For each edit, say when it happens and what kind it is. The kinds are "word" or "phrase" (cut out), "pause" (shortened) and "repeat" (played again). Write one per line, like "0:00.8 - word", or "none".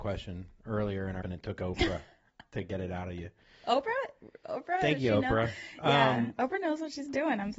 0:01.2 - word